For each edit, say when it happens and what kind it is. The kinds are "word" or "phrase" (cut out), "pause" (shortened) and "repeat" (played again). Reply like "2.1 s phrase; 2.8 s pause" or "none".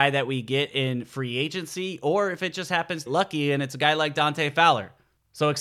3.1 s phrase